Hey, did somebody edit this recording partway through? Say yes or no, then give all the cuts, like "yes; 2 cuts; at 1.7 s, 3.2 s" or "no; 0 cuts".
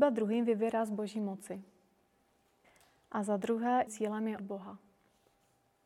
yes; 2 cuts; at 3.9 s, 4.4 s